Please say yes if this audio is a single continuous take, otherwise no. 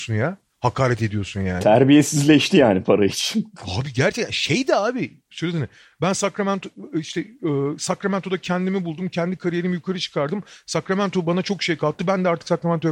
yes